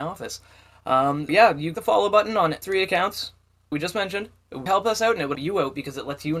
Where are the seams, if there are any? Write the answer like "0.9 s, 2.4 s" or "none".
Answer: 1.3 s, 1.7 s, 2.6 s, 3.7 s, 4.7 s, 5.3 s